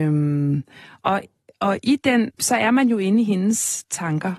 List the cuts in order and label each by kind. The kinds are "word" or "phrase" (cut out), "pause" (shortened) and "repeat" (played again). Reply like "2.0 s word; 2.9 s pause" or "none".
2.3 s word